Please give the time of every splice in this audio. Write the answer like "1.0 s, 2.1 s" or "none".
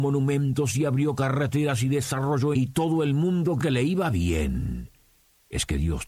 2.5 s, 3.6 s